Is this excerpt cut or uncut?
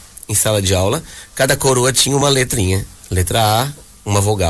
uncut